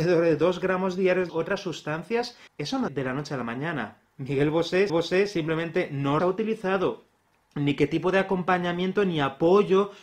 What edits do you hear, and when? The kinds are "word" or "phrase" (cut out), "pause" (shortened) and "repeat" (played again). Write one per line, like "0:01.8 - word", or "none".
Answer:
0:01.3 - phrase
0:02.5 - pause
0:02.9 - word
0:04.1 - pause
0:04.9 - repeat
0:06.2 - phrase